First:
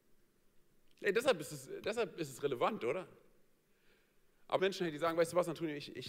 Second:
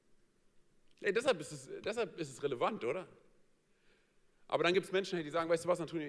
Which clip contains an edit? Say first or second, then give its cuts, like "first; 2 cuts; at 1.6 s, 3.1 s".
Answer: first; 1 cut; at 4.6 s